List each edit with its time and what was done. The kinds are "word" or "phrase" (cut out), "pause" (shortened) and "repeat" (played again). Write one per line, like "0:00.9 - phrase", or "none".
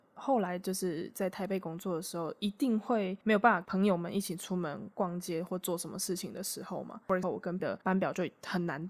0:07.2 - word
0:07.6 - word